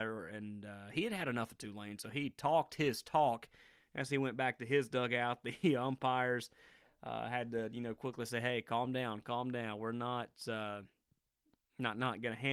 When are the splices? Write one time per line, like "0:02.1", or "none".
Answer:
none